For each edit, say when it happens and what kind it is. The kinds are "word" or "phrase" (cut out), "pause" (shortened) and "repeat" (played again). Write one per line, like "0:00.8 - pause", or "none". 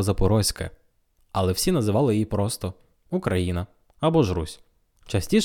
none